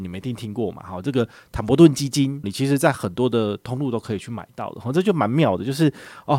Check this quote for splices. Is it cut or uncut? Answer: cut